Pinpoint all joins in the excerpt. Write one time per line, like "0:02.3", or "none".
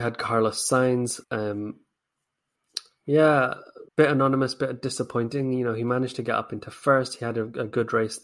0:01.2
0:03.9